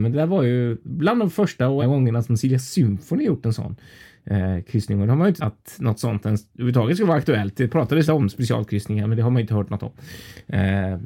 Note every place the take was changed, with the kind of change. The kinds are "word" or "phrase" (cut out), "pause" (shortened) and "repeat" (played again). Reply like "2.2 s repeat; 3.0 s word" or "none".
1.8 s word; 5.4 s word; 8.0 s word